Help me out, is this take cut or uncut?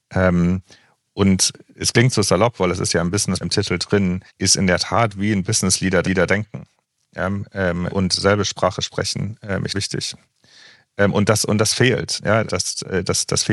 cut